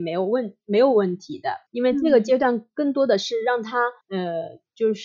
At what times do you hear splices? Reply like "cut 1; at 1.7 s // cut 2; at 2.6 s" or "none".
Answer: cut 1; at 1.7 s // cut 2; at 4.0 s